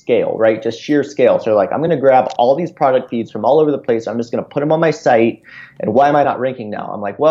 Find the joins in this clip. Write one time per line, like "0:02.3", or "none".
none